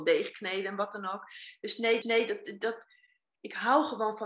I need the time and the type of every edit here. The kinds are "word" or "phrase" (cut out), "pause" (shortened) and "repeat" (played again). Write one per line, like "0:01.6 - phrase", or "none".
0:02.0 - repeat